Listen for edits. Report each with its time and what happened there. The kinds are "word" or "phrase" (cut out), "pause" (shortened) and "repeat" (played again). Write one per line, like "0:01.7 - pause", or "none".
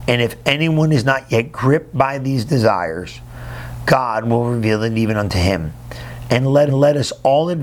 0:06.7 - repeat